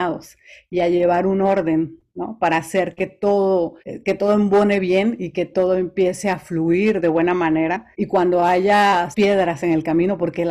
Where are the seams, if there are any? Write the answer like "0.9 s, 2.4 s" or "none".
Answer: 3.8 s, 7.9 s, 9.1 s